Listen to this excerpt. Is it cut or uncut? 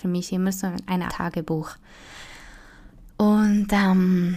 cut